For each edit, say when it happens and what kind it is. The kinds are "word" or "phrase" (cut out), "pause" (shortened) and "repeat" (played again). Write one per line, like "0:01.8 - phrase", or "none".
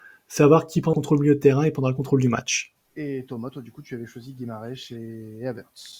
0:00.9 - word
0:02.8 - pause